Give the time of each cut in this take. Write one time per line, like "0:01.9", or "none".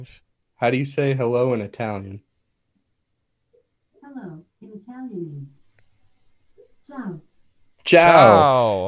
0:04.5